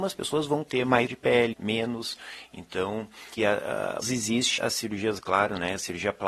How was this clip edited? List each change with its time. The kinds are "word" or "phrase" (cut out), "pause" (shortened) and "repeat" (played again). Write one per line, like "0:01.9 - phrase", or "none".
0:01.1 - word
0:01.5 - word
0:03.4 - word
0:04.0 - word
0:04.6 - word
0:05.2 - word